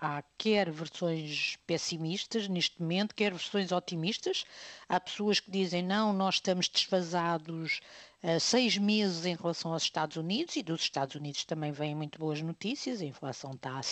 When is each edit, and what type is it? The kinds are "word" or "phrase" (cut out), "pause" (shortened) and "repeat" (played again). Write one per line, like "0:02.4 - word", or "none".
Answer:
none